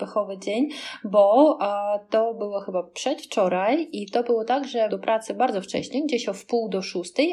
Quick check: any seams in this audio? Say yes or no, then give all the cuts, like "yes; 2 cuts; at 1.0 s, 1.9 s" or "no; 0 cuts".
yes; 1 cut; at 4.9 s